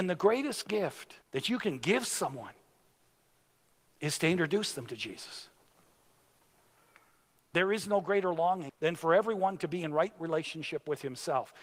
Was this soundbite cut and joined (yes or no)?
yes